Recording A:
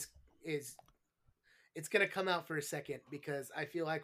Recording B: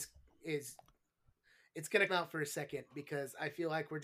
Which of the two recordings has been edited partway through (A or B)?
B